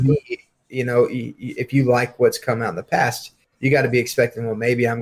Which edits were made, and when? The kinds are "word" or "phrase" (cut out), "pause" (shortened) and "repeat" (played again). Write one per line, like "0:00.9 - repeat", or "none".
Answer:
none